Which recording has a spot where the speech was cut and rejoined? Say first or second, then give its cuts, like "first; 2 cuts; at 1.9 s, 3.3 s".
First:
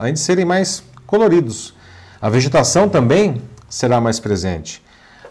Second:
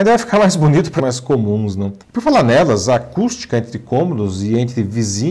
second; 2 cuts; at 1.0 s, 2.0 s